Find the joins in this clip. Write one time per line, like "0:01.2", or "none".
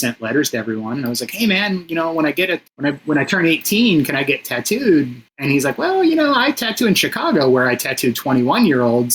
0:02.7
0:05.3

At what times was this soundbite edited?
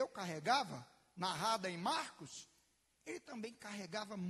none

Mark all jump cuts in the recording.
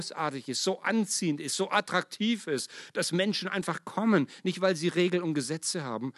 none

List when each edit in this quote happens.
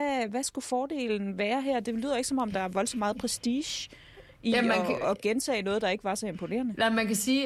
0:05.0

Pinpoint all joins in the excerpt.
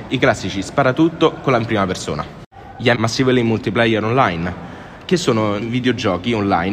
0:01.6
0:02.9
0:05.6

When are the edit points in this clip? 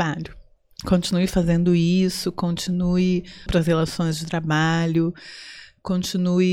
0:03.5

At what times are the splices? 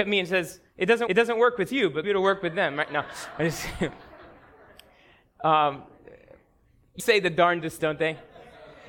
0:01.1
0:02.0
0:07.0
0:07.8

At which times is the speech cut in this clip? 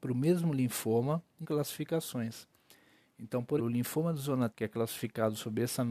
0:01.4
0:03.6
0:04.5

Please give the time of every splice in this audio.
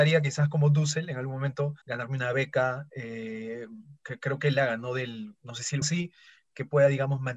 0:01.8
0:05.8

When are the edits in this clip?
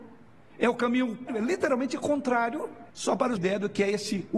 0:01.3
0:02.9
0:03.4

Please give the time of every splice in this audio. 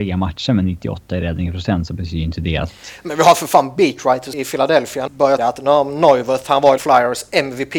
0:04.3
0:05.1
0:05.4
0:06.8

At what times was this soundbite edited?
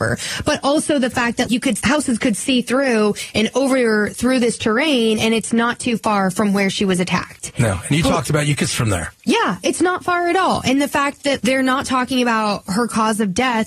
0:01.5
0:01.8
0:08.7
0:11.4

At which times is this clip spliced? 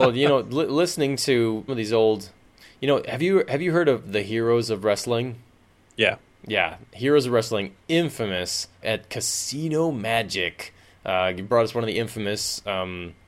0:01.7
0:08.8

